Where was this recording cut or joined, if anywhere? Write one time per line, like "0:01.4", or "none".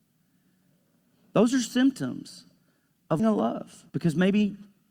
0:03.2
0:03.9